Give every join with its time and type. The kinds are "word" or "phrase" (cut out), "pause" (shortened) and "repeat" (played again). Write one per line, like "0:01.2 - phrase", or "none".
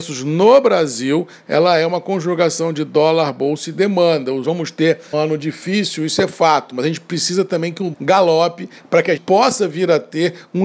0:04.4 - phrase
0:05.1 - word
0:07.9 - word
0:09.2 - word